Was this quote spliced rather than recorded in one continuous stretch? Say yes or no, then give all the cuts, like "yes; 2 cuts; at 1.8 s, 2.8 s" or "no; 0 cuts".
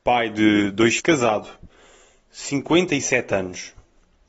yes; 1 cut; at 1.0 s